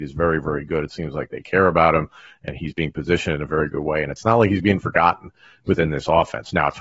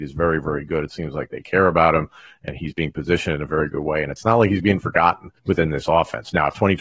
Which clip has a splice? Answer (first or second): second